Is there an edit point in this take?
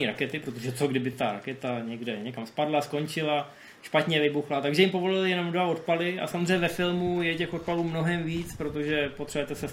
no; 0 cuts

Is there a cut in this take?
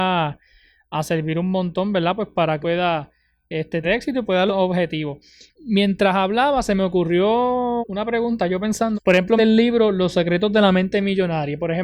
yes; 6 cuts; at 2.6 s, 3.8 s, 4.5 s, 7.8 s, 8.9 s, 9.4 s

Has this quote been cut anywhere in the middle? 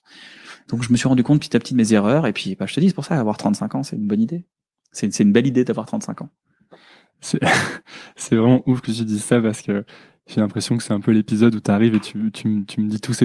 no; 0 cuts

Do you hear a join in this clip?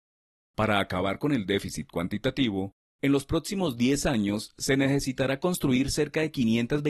no; 0 cuts

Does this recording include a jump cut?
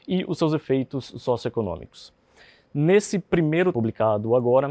yes; 1 cut; at 3.7 s

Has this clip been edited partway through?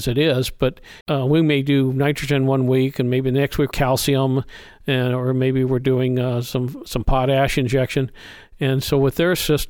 yes; 2 cuts; at 1.0 s, 3.7 s

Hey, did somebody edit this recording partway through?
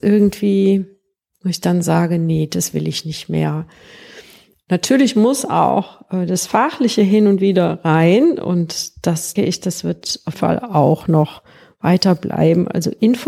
yes; 2 cuts; at 9.4 s, 10.3 s

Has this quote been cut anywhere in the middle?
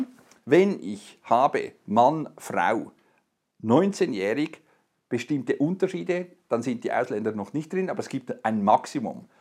no; 0 cuts

